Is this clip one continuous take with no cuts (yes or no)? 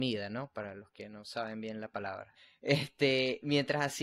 yes